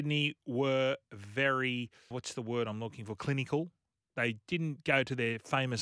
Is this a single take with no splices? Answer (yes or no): no